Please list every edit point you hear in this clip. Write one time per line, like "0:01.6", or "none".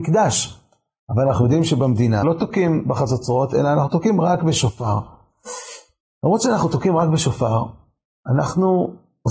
0:02.2